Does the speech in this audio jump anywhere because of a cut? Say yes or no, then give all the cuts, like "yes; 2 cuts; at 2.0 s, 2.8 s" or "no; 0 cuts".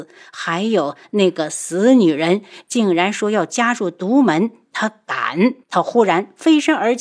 yes; 1 cut; at 5.6 s